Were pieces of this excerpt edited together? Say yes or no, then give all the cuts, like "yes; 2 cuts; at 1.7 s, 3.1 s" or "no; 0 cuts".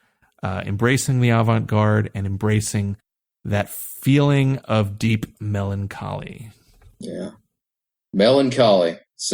no; 0 cuts